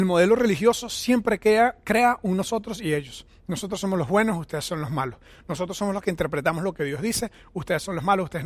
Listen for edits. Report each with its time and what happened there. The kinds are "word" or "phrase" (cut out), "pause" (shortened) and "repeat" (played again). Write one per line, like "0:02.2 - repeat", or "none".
none